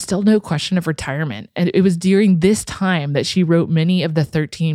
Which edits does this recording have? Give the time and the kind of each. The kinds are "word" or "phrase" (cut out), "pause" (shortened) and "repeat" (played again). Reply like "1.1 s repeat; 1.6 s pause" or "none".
none